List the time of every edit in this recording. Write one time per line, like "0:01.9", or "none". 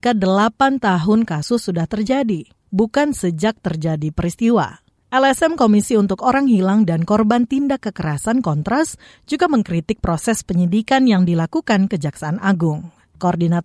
none